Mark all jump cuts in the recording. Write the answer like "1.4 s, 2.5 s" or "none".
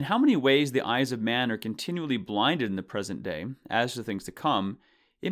none